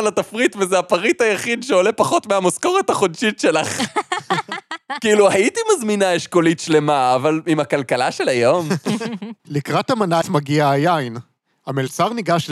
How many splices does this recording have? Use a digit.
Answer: 2